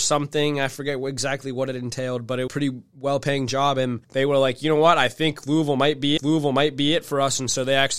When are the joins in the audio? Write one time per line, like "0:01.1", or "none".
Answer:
0:02.5
0:04.0
0:06.2